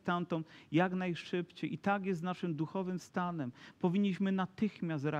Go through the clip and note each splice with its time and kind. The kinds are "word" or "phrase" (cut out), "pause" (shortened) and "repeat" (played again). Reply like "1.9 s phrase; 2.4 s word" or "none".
none